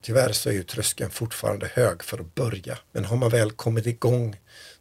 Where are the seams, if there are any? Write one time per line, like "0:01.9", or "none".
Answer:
0:02.9

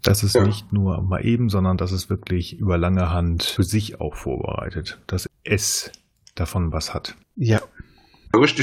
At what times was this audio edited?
none

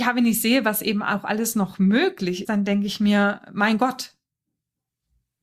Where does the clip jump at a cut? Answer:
0:02.4

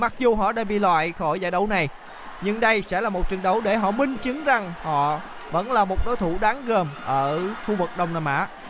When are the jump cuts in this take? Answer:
none

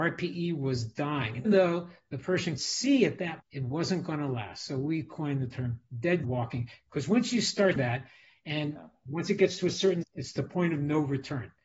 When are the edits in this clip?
0:01.5
0:02.6
0:03.4
0:06.2
0:07.8
0:10.0

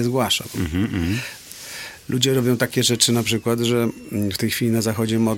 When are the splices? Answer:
none

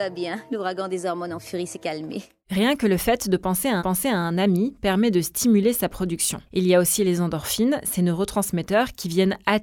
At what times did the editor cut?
0:03.8

